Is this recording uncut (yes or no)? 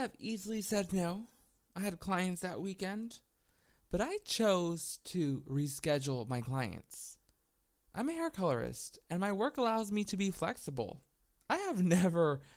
yes